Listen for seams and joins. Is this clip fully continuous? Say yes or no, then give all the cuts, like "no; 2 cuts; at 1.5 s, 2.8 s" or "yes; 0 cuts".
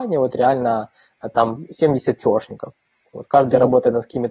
yes; 0 cuts